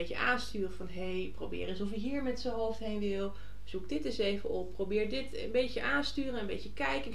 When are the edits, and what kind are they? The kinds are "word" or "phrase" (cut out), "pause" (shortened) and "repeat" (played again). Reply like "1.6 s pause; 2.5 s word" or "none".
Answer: none